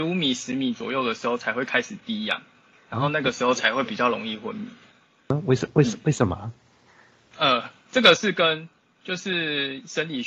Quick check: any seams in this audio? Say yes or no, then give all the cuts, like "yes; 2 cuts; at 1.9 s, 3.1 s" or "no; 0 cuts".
no; 0 cuts